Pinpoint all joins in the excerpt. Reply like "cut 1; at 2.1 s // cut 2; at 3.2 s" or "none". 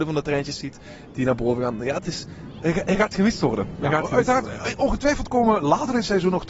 none